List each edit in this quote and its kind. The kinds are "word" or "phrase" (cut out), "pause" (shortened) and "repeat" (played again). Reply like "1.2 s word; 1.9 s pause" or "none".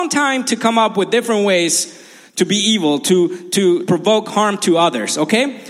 3.9 s word